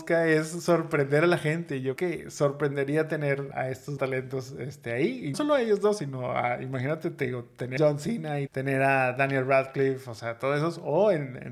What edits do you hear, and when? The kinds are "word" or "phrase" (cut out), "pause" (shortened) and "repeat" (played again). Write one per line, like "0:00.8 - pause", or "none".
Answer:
0:02.0 - word
0:03.5 - word
0:04.0 - word
0:05.3 - word
0:07.8 - word
0:08.5 - word